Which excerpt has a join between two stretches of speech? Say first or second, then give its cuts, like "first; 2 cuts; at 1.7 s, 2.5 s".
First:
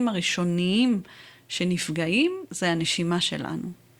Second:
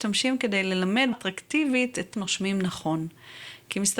second; 2 cuts; at 1.1 s, 2.1 s